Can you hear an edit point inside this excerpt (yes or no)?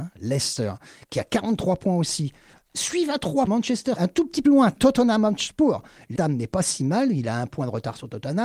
yes